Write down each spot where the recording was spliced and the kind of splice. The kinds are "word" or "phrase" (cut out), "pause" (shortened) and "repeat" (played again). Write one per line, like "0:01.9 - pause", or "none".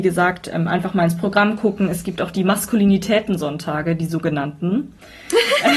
none